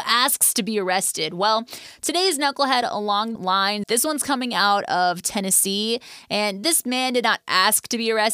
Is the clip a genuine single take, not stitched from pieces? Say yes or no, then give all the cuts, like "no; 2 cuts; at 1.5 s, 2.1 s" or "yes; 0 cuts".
no; 2 cuts; at 3.4 s, 3.8 s